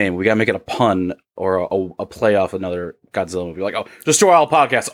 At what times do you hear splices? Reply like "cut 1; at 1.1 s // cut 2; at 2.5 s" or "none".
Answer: none